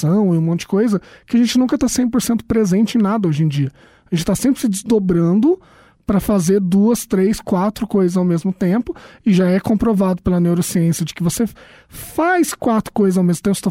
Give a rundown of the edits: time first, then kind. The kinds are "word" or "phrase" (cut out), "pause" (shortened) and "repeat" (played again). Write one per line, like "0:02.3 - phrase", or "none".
none